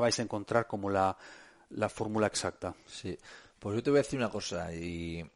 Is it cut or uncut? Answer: uncut